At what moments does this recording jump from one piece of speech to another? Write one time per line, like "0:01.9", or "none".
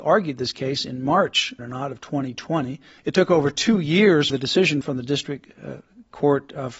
0:01.6
0:03.0
0:04.3
0:04.8